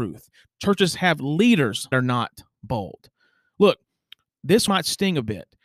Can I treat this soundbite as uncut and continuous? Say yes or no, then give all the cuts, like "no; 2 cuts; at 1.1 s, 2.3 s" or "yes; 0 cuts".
no; 2 cuts; at 1.9 s, 4.7 s